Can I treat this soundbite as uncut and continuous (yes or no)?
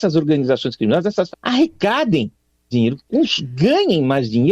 no